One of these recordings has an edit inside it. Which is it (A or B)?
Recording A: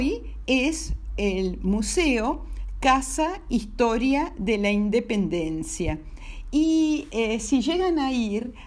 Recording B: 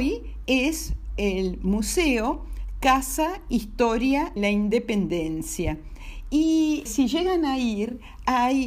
B